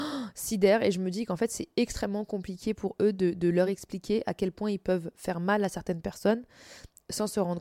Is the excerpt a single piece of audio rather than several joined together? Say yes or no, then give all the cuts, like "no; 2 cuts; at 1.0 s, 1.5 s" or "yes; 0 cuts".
yes; 0 cuts